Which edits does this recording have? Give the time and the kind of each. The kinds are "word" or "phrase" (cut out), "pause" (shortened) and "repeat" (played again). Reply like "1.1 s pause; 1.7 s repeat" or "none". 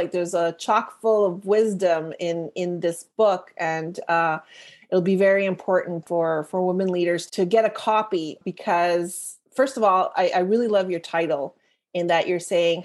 7.3 s word; 9.4 s pause

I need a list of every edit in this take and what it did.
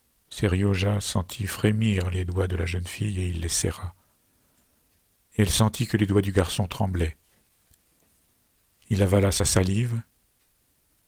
none

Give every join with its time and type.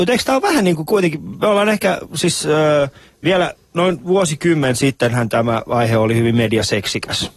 none

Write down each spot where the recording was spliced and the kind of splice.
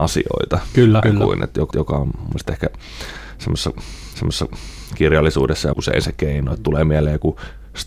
1.0 s word; 1.7 s repeat; 4.1 s repeat; 5.7 s word

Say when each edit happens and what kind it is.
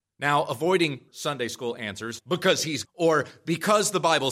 1.1 s word; 2.2 s word; 2.8 s word

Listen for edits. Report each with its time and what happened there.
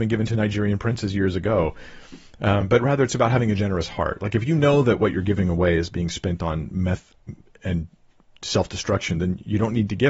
none

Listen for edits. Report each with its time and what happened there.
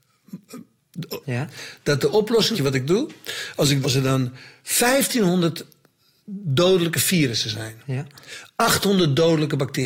1.2 s phrase; 2.5 s phrase; 3.8 s word

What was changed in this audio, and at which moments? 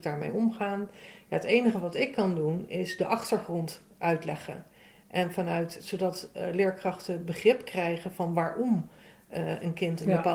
5.8 s word

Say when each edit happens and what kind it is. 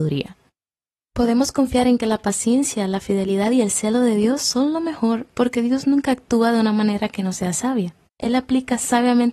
8.1 s pause

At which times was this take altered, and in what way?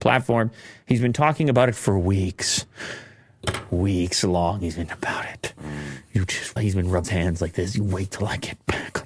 4.9 s word; 6.6 s phrase; 7.0 s word

